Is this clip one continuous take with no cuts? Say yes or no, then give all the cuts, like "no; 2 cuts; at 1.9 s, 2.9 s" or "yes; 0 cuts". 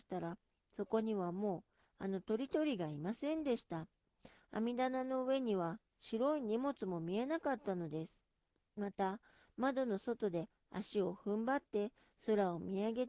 yes; 0 cuts